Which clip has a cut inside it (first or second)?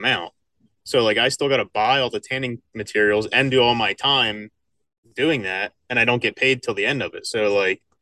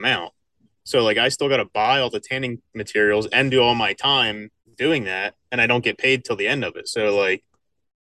second